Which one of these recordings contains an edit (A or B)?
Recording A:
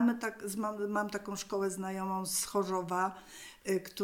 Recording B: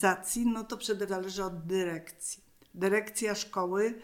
B